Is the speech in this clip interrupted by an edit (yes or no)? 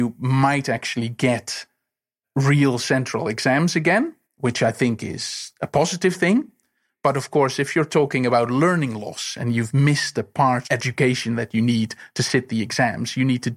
yes